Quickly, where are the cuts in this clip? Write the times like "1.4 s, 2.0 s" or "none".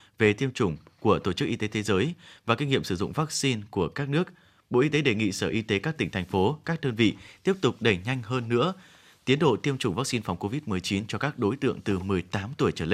none